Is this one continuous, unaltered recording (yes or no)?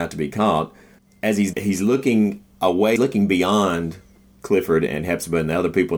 no